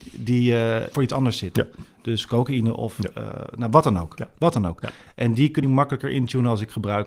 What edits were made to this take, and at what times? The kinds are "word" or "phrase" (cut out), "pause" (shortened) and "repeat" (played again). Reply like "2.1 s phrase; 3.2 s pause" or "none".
0.9 s word; 5.6 s word

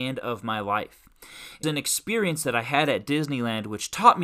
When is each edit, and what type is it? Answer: 1.6 s word

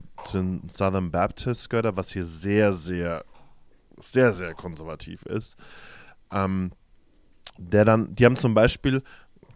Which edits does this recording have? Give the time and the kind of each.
none

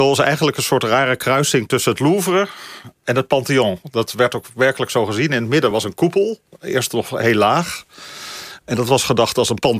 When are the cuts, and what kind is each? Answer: none

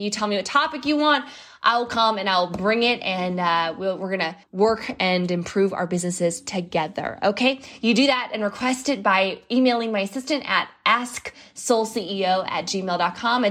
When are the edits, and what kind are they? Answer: 4.4 s pause

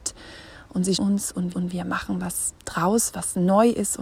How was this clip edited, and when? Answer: 1.0 s word; 1.5 s repeat; 2.6 s pause

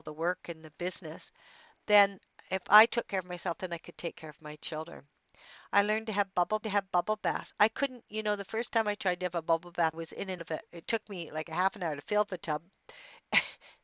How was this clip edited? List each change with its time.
6.6 s repeat; 9.9 s word; 10.4 s word

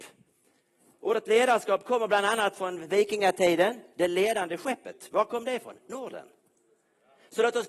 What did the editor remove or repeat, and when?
none

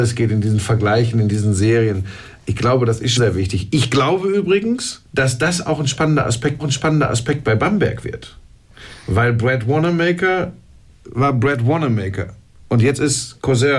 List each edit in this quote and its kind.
3.2 s word; 5.0 s pause; 6.6 s repeat

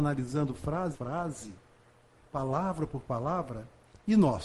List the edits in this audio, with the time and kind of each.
0.9 s word

